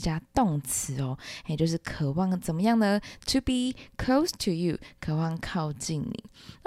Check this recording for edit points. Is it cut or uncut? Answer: uncut